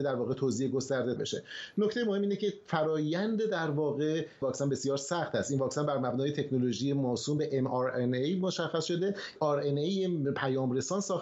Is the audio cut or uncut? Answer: cut